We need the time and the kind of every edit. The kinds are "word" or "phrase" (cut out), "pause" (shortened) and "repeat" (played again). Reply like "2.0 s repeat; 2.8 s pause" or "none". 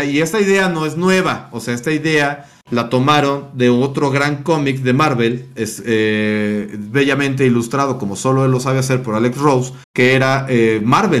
9.8 s pause